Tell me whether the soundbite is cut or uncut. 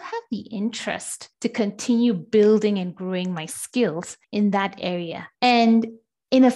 cut